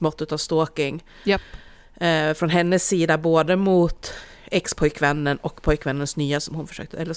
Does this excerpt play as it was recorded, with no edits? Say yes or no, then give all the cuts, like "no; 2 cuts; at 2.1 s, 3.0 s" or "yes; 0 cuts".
yes; 0 cuts